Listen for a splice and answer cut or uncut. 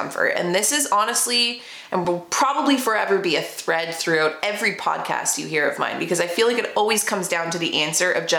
uncut